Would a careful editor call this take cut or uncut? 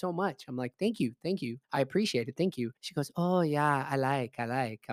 cut